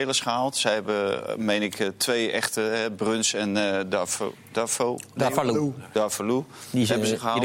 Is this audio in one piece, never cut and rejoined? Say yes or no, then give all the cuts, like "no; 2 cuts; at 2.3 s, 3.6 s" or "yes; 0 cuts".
yes; 0 cuts